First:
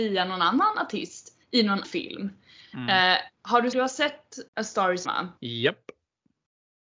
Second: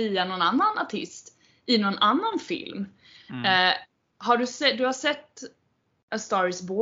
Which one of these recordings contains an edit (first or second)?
first